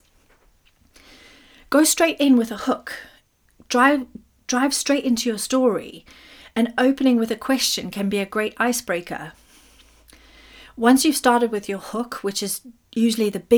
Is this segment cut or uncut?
uncut